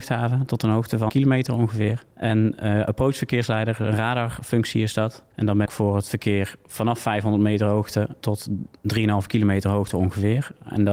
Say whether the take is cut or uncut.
cut